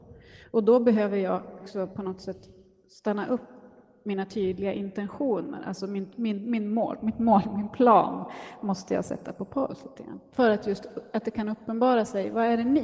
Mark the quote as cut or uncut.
cut